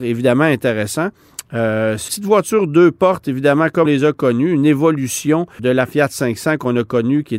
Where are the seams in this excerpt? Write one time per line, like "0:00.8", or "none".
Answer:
0:02.1
0:03.9
0:05.6